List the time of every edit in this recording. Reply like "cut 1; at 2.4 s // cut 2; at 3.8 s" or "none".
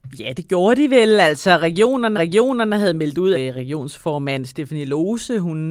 cut 1; at 2.1 s // cut 2; at 3.3 s